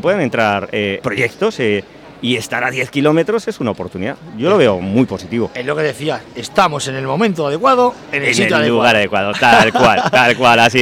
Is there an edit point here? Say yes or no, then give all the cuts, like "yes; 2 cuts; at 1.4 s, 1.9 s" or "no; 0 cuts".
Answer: yes; 1 cut; at 1.0 s